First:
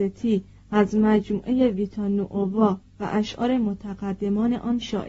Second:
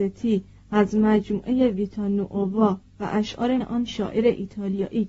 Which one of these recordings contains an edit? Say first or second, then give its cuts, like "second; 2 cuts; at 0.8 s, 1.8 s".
second; 1 cut; at 3.6 s